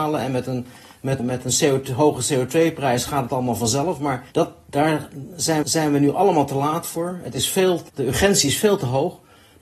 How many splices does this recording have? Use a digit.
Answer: 4